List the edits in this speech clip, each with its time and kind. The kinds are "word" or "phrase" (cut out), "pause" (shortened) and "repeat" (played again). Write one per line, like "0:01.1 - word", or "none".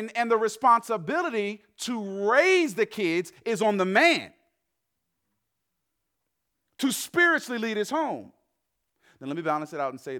none